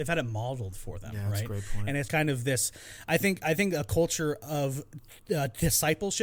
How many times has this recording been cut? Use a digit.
1